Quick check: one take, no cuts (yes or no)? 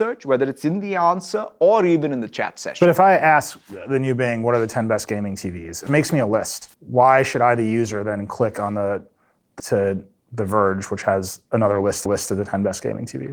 no